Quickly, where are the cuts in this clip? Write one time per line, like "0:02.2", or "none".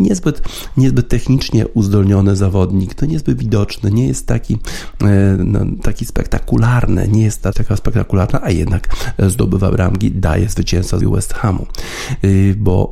0:07.5
0:11.0